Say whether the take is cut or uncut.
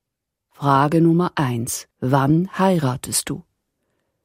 cut